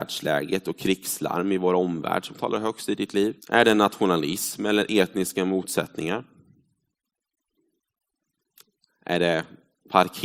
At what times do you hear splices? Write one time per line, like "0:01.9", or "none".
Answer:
0:03.4